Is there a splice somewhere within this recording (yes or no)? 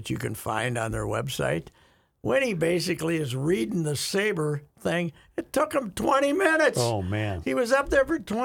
no